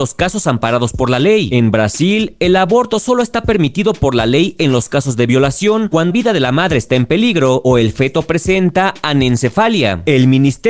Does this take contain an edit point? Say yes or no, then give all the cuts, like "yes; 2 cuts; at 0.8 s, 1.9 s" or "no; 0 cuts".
yes; 1 cut; at 6.1 s